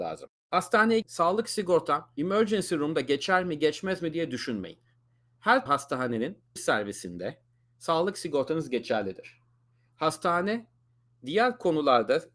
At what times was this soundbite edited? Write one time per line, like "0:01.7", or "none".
0:01.0
0:05.7
0:06.6